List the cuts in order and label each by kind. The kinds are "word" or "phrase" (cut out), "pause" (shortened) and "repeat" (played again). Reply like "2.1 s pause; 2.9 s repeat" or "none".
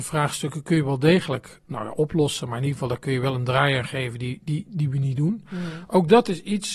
1.6 s pause